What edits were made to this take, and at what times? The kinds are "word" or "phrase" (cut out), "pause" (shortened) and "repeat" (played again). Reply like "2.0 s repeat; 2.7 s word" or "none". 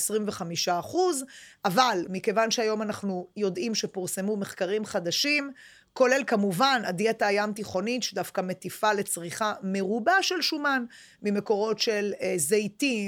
none